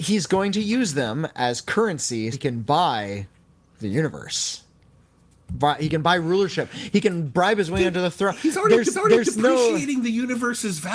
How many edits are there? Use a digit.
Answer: 2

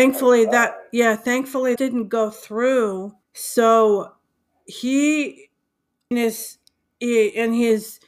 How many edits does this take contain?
3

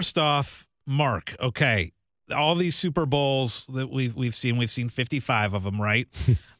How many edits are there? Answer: 0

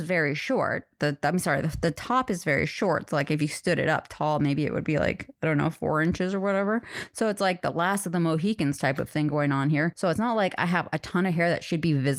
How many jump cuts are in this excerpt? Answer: 0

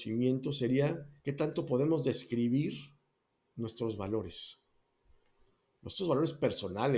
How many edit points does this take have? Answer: 1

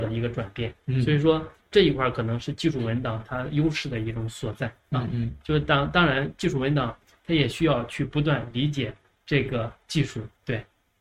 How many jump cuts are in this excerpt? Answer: 0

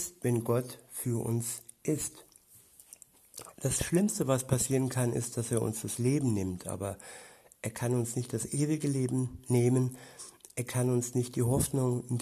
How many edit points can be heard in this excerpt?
0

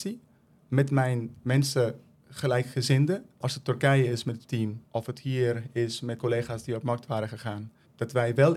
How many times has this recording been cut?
2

